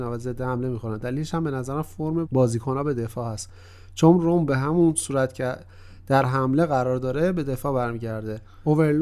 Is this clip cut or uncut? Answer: cut